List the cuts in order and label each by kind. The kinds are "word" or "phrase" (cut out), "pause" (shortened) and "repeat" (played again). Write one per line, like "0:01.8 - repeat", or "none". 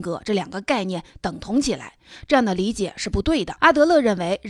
0:03.6 - pause